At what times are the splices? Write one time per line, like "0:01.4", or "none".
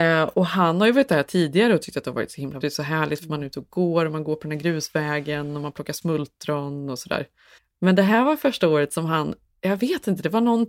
0:02.6
0:07.6